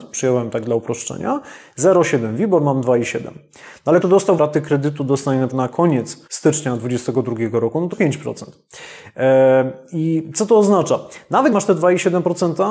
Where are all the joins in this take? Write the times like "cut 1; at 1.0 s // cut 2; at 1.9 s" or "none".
cut 1; at 4.0 s // cut 2; at 4.4 s // cut 3; at 5.5 s // cut 4; at 6.3 s // cut 5; at 7.9 s // cut 6; at 11.5 s